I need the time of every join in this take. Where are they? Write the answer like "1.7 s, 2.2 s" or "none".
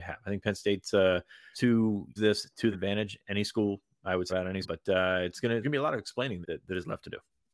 1.5 s, 2.2 s, 2.7 s, 4.3 s, 4.6 s, 5.6 s, 6.4 s

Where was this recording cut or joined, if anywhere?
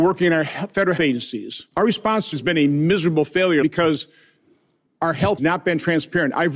1.0 s, 1.7 s, 2.3 s, 3.6 s, 5.4 s

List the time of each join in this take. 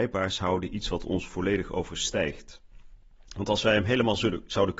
3.3 s

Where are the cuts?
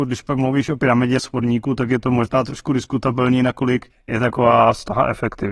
1.2 s, 3.9 s

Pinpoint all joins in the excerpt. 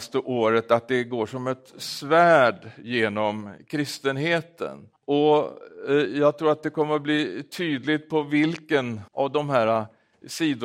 5.0 s, 9.1 s

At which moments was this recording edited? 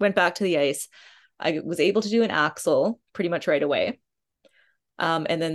none

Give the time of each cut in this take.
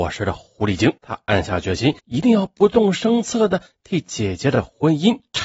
1.0 s, 2.0 s

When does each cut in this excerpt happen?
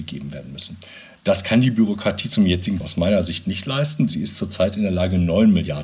2.8 s

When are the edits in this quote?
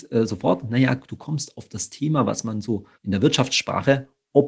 2.9 s

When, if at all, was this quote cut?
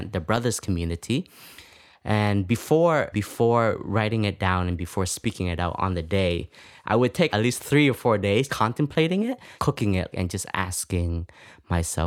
3.1 s, 7.3 s, 8.5 s, 9.6 s, 10.1 s

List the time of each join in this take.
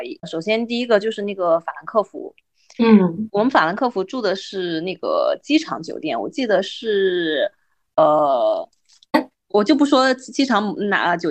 none

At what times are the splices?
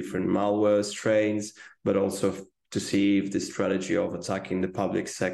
none

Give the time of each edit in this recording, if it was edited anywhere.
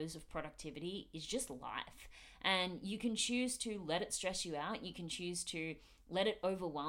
none

